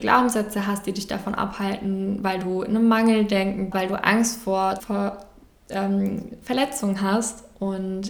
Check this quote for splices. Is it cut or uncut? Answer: cut